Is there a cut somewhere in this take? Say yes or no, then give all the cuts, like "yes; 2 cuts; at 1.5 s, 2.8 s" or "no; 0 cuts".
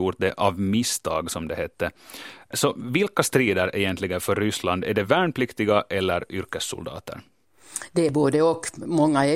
no; 0 cuts